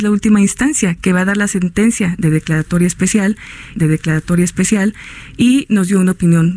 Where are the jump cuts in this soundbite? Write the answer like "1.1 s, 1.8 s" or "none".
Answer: 1.0 s, 3.7 s